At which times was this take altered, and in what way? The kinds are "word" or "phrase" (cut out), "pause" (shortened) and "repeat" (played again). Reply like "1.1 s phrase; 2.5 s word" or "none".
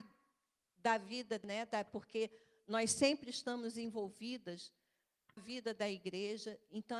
1.4 s word; 5.4 s word